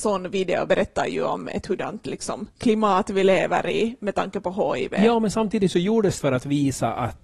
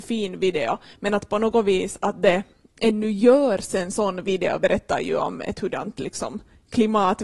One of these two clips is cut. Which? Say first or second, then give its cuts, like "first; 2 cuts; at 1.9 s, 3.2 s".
first; 2 cuts; at 2.5 s, 6.2 s